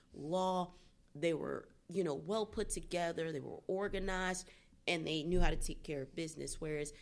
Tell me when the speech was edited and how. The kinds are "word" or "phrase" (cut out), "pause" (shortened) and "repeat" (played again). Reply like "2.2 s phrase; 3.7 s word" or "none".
none